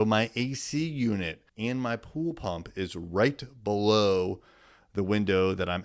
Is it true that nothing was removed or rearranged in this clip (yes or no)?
no